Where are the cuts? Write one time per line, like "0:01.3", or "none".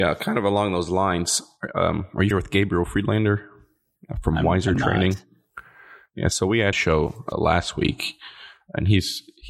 0:02.3
0:06.7
0:07.3